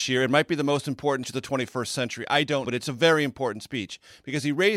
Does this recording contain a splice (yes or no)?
yes